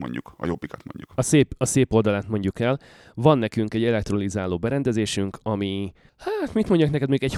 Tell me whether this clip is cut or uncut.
uncut